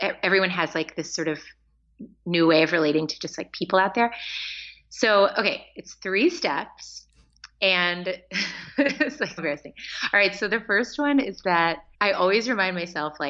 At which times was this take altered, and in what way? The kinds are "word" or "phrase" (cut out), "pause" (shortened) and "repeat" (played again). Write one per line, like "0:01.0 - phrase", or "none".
0:09.4 - word
0:11.9 - pause